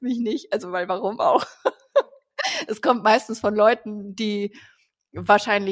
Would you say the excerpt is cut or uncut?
uncut